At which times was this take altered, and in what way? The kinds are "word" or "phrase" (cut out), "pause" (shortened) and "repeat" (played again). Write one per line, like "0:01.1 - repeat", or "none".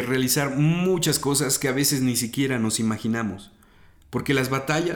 none